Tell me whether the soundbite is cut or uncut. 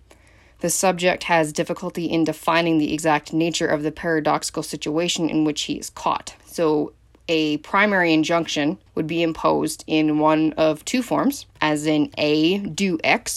cut